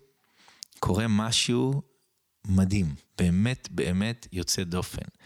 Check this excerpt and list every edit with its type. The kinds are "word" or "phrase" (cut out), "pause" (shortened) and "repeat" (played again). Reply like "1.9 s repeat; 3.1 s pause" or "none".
3.1 s pause